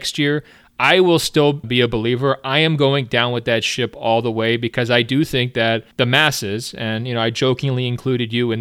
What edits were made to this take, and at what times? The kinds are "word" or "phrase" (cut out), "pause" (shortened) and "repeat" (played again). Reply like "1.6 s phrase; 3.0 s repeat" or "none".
1.6 s word; 5.9 s pause

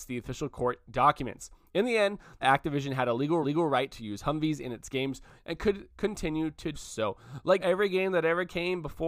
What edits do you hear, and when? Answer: 2.4 s phrase; 3.4 s repeat; 6.7 s word; 7.6 s word

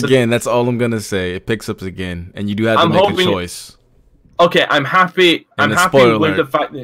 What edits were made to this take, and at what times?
5.5 s pause

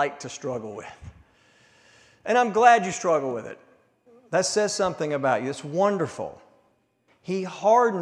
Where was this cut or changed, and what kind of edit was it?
none

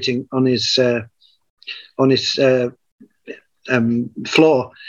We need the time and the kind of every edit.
none

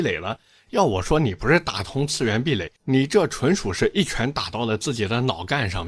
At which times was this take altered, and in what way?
2.8 s pause

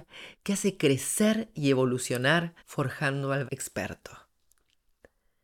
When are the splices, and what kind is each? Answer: 2.6 s pause; 3.5 s word

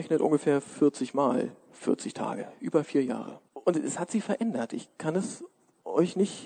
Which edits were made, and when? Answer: 3.5 s pause

